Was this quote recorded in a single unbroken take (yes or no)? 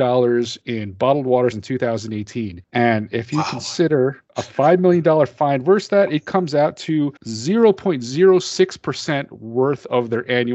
no